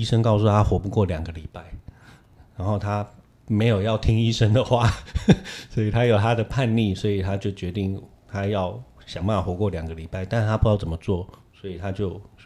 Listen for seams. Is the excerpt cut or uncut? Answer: uncut